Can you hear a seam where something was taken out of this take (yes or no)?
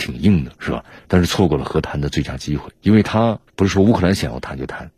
yes